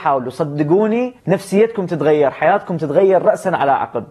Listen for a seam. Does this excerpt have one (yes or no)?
yes